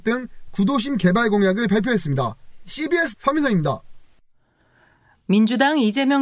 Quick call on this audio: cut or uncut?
cut